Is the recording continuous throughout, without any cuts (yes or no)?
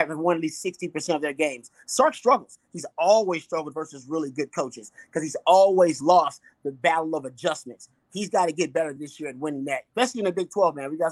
yes